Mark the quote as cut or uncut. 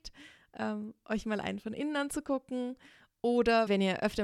uncut